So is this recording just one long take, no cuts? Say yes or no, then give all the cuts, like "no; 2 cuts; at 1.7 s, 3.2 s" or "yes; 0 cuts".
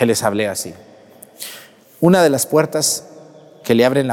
yes; 0 cuts